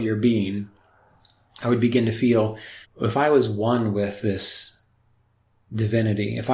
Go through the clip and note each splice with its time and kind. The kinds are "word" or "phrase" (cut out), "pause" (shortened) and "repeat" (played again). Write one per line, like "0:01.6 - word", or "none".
0:02.8 - pause